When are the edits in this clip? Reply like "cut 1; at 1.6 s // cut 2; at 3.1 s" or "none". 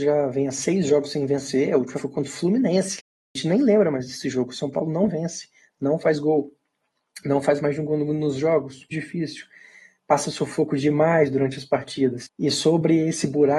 cut 1; at 1.9 s // cut 2; at 8.9 s